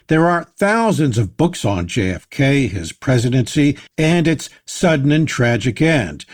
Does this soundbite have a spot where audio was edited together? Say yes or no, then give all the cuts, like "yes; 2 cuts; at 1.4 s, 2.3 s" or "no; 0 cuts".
yes; 1 cut; at 3.9 s